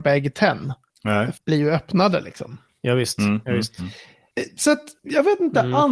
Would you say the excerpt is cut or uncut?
cut